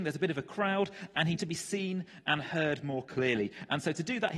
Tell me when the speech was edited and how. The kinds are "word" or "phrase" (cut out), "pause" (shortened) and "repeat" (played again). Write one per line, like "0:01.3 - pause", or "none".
0:01.4 - word